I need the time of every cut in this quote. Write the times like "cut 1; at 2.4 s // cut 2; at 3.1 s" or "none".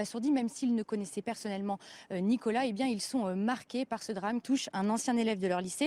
cut 1; at 1.2 s // cut 2; at 4.4 s